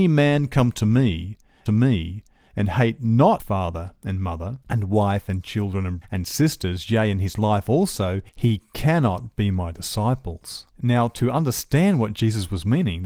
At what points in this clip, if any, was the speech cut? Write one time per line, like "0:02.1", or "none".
0:01.7
0:03.4
0:04.6
0:06.0
0:08.3
0:10.7